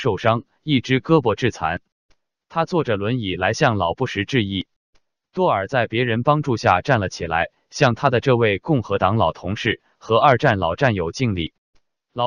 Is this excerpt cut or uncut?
uncut